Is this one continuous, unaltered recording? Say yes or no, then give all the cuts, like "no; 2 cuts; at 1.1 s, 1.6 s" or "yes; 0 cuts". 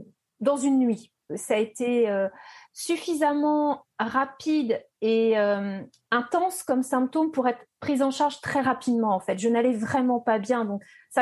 yes; 0 cuts